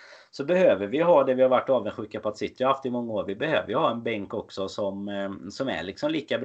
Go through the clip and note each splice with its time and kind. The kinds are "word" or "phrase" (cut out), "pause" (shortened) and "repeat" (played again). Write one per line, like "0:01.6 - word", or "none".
none